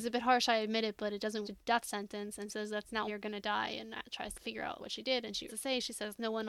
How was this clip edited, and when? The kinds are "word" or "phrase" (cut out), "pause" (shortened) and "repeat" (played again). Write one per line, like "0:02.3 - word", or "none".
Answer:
0:01.4 - word
0:02.5 - word
0:03.1 - word
0:04.3 - word
0:04.8 - word
0:05.5 - word